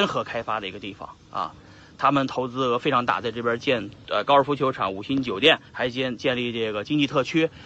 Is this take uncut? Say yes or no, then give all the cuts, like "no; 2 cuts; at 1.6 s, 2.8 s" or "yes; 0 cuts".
no; 1 cut; at 5.7 s